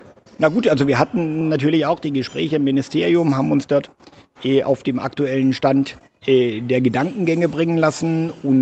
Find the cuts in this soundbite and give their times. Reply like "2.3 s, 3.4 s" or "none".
none